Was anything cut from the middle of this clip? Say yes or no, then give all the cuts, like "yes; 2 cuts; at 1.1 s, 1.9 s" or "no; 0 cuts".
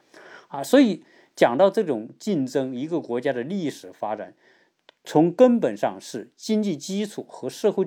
no; 0 cuts